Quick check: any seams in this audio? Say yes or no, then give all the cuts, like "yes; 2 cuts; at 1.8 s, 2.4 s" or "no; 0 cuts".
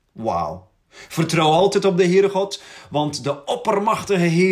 no; 0 cuts